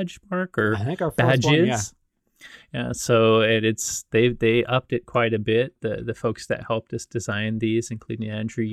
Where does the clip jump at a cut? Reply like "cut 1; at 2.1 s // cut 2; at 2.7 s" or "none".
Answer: none